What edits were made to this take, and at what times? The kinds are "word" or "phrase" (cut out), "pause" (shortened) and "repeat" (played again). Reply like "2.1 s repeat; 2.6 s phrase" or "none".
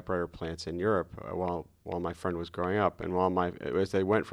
none